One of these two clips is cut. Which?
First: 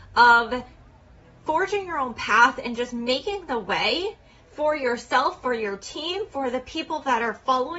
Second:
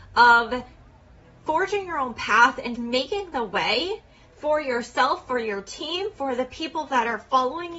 second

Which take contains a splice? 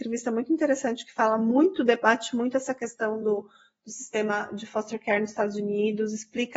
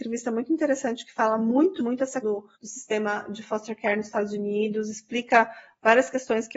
second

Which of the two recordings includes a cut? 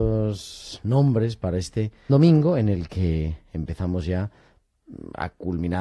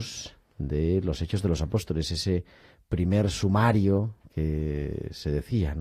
first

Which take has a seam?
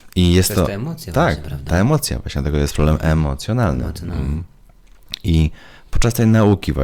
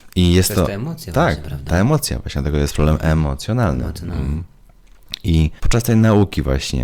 second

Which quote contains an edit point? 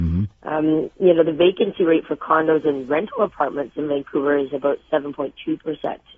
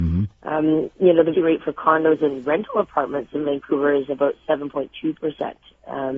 second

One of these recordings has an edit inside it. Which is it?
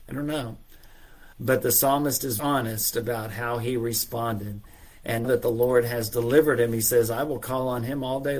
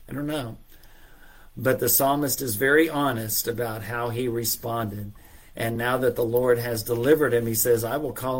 first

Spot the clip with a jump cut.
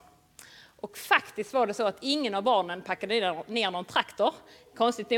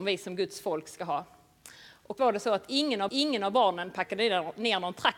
second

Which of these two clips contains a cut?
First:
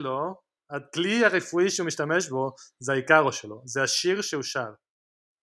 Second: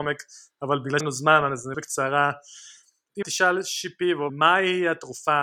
second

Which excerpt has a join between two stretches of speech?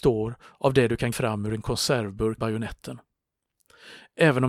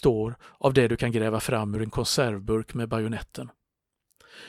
first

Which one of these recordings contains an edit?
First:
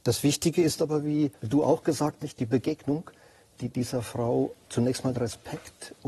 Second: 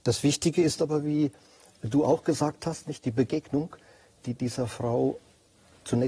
first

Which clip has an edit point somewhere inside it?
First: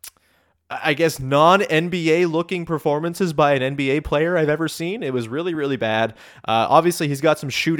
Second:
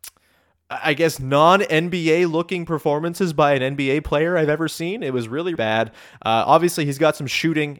second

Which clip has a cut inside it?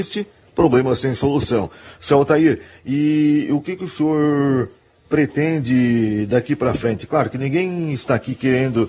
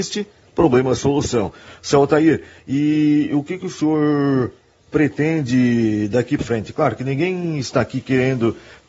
second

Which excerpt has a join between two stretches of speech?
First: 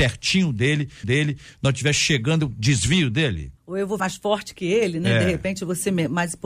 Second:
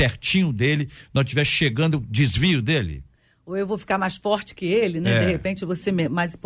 first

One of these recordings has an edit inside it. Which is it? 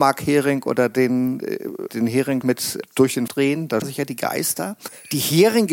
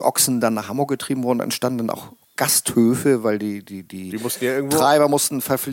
first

